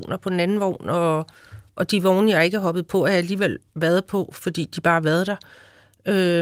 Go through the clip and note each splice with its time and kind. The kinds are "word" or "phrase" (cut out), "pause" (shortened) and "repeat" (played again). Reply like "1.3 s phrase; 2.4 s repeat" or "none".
1.7 s pause; 3.7 s pause